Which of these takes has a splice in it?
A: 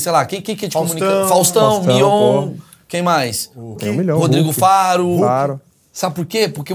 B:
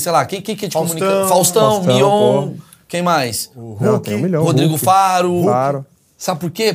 A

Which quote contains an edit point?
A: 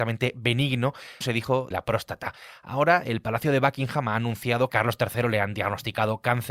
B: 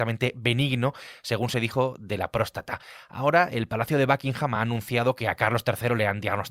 A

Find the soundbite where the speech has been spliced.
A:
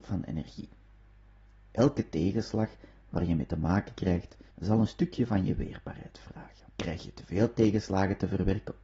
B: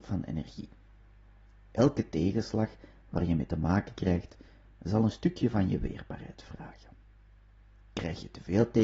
A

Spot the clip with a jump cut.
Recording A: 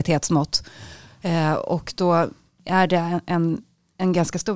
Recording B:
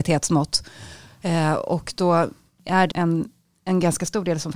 B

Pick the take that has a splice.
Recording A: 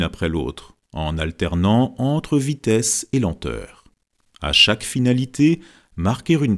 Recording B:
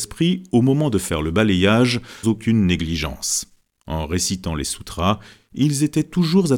B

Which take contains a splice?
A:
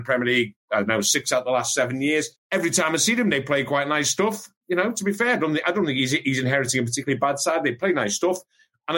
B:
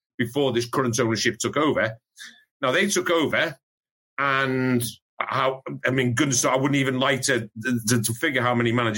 A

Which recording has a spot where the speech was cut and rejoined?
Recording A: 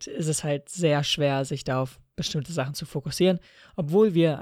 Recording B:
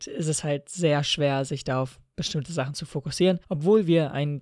B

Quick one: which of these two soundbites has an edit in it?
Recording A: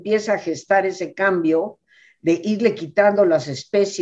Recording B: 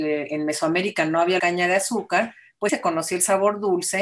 B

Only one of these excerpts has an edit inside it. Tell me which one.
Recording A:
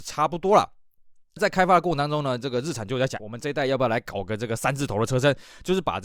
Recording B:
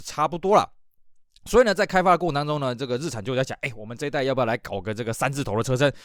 A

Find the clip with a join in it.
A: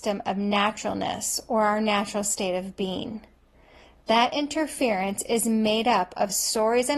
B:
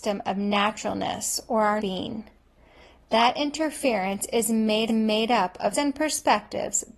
B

